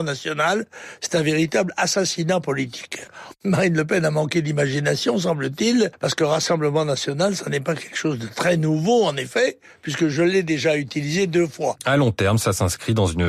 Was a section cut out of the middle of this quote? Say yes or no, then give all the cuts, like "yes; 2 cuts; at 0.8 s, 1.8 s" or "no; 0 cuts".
no; 0 cuts